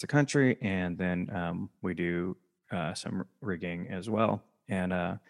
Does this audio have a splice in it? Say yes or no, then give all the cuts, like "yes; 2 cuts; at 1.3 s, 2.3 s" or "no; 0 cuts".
no; 0 cuts